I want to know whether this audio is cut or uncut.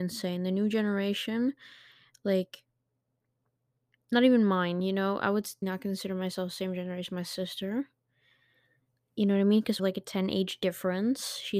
cut